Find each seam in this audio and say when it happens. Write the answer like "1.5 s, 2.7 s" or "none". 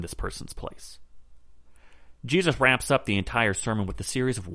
none